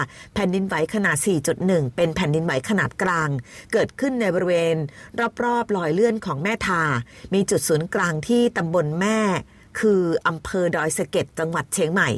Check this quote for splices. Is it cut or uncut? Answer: uncut